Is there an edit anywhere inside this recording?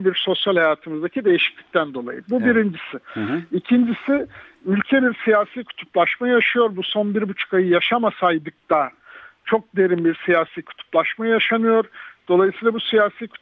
no; 0 cuts

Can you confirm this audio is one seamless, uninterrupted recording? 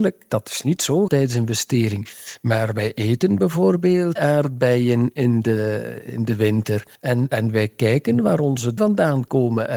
no; 4 cuts; at 1.1 s, 4.2 s, 6.9 s, 8.8 s

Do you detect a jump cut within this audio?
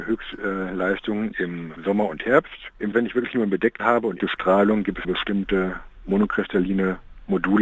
yes; 5 cuts; at 1.8 s, 2.9 s, 3.8 s, 4.2 s, 5.0 s

